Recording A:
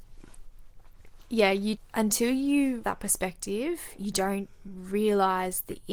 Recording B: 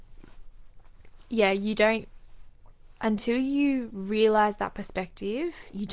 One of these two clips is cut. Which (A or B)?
A